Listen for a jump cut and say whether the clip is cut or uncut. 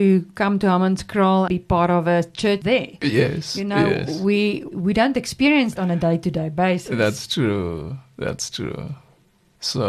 cut